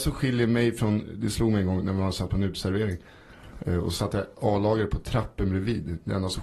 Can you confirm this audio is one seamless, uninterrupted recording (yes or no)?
yes